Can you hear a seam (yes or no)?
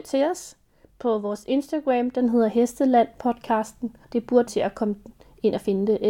yes